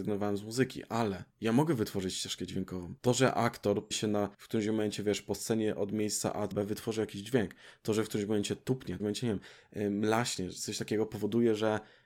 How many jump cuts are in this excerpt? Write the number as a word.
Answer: six